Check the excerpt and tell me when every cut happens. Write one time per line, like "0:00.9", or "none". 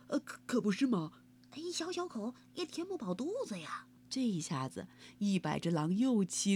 0:04.0